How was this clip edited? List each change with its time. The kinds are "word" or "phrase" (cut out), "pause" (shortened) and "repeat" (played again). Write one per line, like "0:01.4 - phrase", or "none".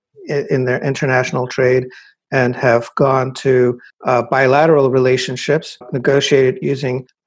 none